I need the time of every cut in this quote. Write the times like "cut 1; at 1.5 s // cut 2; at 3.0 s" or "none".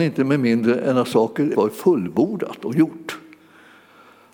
cut 1; at 1.5 s